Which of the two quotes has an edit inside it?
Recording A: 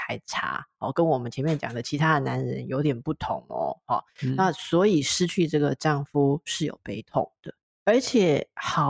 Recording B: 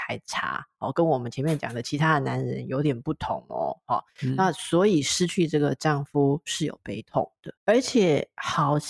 B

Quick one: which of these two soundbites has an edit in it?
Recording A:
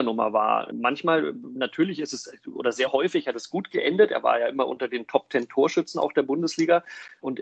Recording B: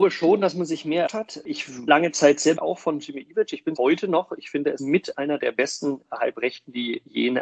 B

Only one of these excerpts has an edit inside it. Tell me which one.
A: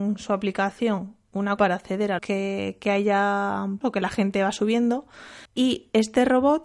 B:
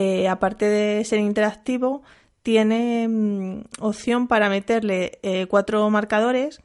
A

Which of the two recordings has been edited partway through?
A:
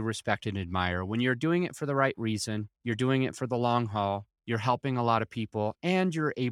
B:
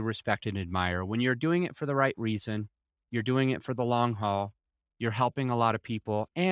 A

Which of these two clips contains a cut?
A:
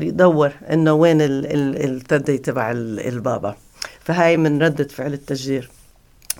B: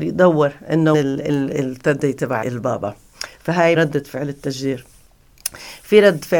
B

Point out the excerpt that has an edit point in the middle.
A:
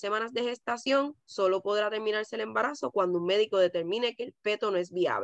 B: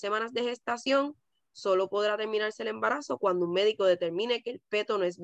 A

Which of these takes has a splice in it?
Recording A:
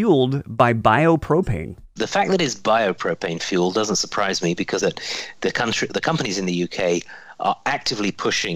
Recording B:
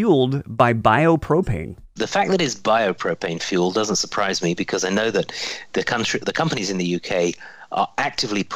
A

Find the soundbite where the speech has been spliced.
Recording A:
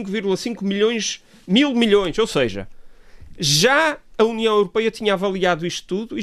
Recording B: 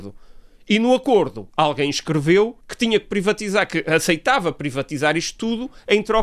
B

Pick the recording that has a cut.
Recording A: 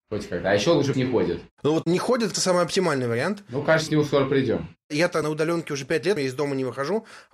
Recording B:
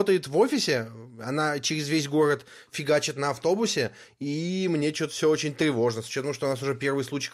A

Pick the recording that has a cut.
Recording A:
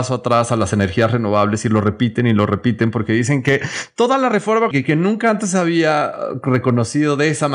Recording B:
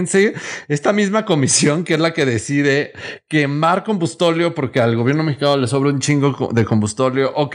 A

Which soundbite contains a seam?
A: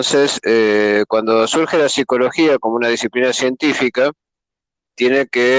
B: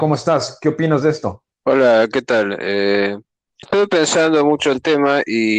B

